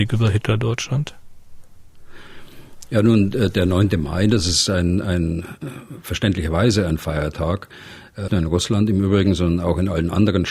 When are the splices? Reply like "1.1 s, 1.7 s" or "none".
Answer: 8.3 s

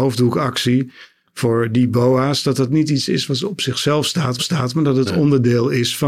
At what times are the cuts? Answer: 4.4 s

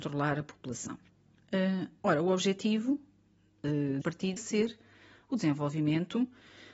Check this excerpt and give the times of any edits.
4.0 s, 4.4 s

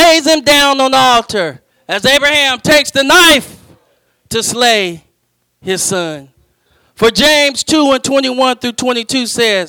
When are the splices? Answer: 1.7 s

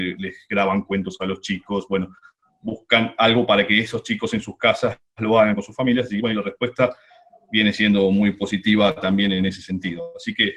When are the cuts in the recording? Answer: none

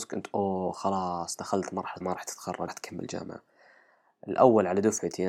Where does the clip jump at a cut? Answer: 2.0 s, 2.7 s

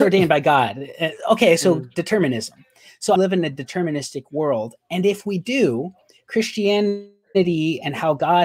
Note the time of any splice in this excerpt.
3.2 s

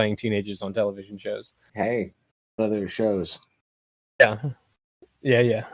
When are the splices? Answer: 2.6 s

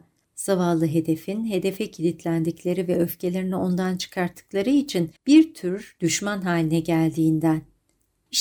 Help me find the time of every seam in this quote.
5.2 s

